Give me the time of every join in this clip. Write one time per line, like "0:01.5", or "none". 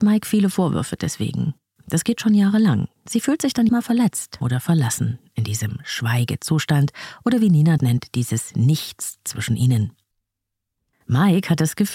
0:03.7
0:04.4
0:07.8